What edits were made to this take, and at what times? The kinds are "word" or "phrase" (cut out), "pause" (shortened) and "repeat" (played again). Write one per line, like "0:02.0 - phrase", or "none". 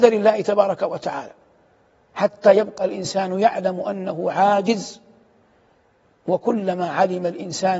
none

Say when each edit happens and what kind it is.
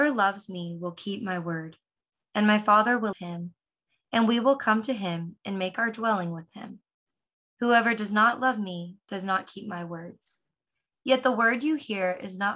0:03.1 - word

